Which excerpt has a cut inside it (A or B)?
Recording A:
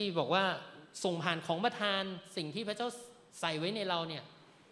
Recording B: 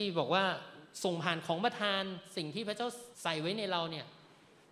B